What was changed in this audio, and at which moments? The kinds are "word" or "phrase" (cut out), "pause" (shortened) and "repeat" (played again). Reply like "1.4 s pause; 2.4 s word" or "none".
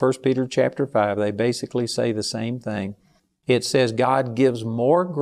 none